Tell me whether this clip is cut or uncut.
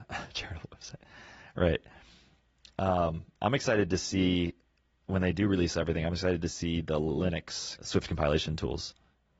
uncut